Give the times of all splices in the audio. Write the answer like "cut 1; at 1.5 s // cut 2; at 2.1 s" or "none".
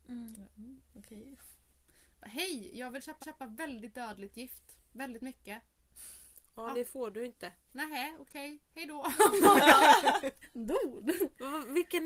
cut 1; at 3.2 s // cut 2; at 6.7 s // cut 3; at 10.4 s